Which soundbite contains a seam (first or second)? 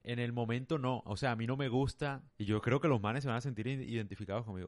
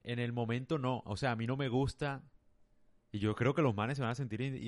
first